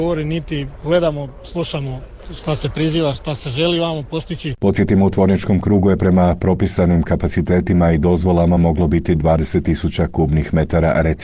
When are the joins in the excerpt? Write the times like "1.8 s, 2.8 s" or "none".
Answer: none